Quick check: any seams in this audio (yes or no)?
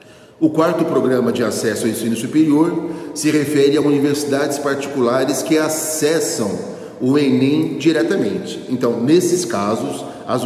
no